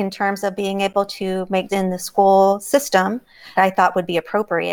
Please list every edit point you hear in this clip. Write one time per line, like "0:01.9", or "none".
0:01.7
0:03.6